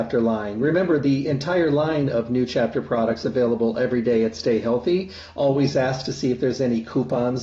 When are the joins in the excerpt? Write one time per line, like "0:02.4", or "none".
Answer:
none

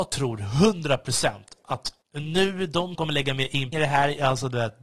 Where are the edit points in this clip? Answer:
0:02.0
0:02.9
0:03.7

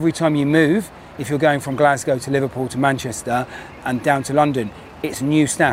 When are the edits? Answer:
0:03.8

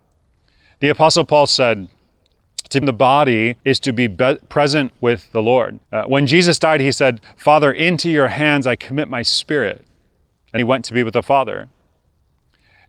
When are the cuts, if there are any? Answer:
0:02.8
0:03.6
0:05.8
0:10.6

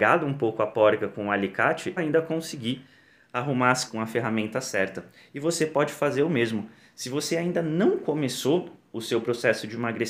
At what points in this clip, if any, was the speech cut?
0:02.0
0:03.9

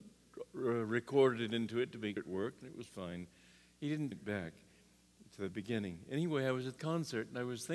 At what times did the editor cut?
0:02.2
0:04.1
0:06.8

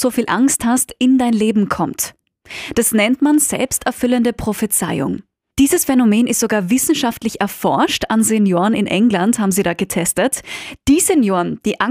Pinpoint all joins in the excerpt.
none

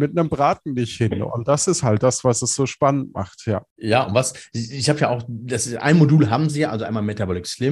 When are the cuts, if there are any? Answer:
0:03.7

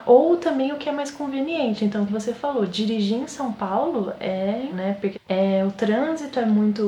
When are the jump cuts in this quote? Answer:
0:02.1
0:04.7
0:05.1

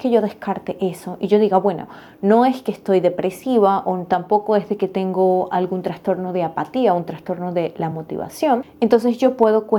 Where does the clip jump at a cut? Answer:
none

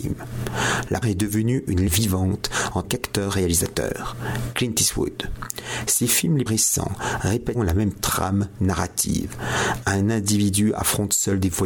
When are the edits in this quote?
0:01.0
0:01.9
0:02.8
0:06.5
0:07.5

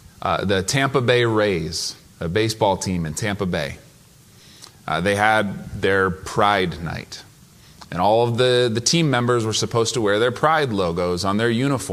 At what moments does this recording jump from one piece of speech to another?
0:02.1

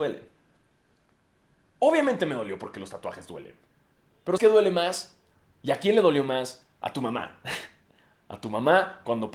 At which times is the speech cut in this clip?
0:04.4
0:06.7

